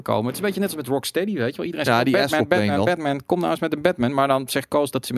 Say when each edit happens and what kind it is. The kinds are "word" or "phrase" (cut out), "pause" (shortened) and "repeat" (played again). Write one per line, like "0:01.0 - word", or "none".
none